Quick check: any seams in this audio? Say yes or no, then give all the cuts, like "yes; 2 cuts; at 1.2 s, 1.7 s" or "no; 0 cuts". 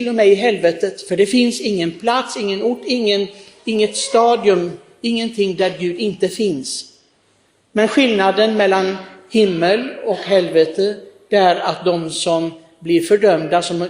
no; 0 cuts